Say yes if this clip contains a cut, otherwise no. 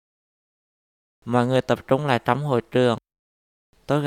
no